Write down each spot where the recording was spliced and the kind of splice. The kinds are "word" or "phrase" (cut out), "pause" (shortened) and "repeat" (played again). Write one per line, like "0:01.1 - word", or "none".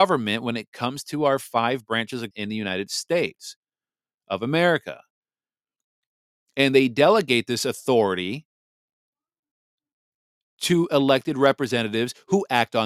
0:02.3 - word